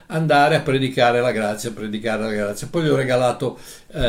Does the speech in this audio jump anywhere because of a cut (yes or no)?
no